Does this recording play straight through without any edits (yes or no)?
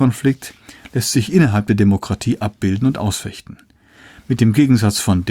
yes